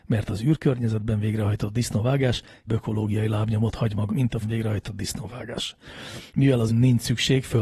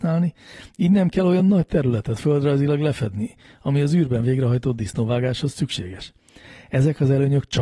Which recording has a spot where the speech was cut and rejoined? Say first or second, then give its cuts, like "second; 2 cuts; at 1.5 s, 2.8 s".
first; 4 cuts; at 2.7 s, 4.1 s, 4.4 s, 6.7 s